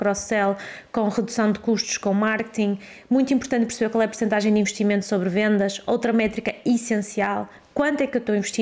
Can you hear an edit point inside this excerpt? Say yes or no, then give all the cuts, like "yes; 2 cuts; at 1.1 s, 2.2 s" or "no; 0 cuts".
no; 0 cuts